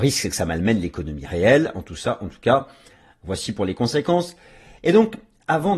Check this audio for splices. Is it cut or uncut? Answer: uncut